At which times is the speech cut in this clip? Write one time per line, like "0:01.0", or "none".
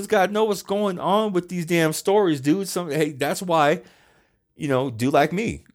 none